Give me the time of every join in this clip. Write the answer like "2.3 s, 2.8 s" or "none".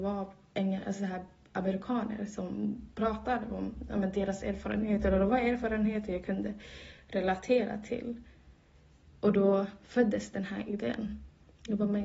none